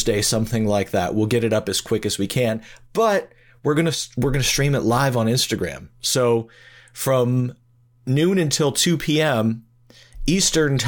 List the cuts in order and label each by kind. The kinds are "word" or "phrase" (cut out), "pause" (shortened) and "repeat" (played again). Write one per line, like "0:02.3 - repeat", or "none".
none